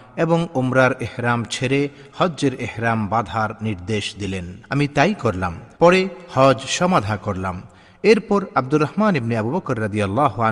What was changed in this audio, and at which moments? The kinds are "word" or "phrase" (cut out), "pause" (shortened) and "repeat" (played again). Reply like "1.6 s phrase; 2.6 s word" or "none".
5.7 s pause